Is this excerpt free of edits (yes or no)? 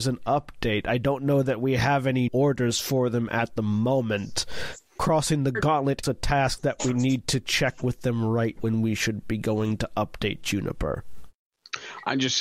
no